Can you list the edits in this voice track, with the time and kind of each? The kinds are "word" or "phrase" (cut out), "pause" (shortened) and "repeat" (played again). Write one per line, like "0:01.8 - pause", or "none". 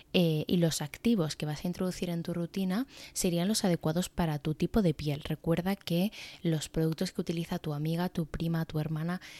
none